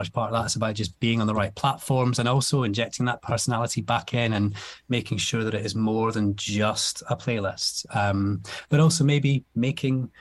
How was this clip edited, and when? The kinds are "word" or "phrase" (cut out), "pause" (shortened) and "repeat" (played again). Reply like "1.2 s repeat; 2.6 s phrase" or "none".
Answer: none